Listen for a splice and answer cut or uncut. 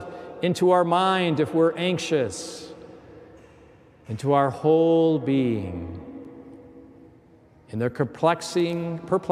uncut